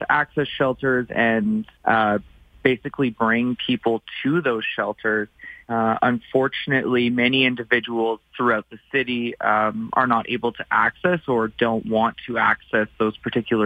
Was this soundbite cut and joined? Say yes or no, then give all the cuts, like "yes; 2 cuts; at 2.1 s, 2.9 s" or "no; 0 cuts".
yes; 2 cuts; at 1.7 s, 5.6 s